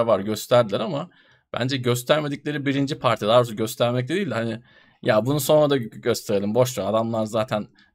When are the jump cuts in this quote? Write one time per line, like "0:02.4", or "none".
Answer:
none